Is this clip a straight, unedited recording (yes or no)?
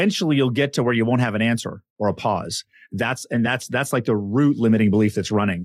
yes